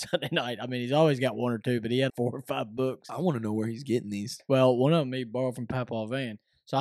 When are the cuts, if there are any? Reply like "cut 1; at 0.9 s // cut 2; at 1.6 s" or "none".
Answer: cut 1; at 2.1 s